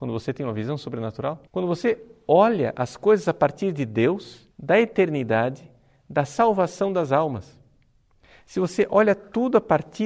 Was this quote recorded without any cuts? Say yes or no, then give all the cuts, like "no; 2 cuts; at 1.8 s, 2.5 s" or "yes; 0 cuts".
no; 2 cuts; at 1.5 s, 4.5 s